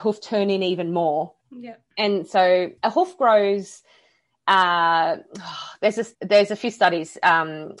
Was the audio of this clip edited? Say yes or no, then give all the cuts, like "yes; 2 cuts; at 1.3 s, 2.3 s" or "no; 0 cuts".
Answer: yes; 3 cuts; at 1.4 s, 2.8 s, 6.1 s